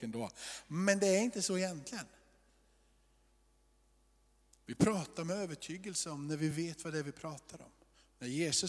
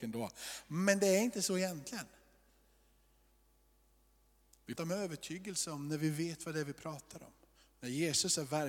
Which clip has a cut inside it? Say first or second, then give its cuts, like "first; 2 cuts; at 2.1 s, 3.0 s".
second; 1 cut; at 4.8 s